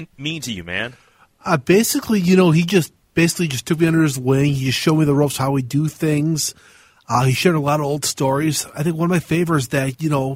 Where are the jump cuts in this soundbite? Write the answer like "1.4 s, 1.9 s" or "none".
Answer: none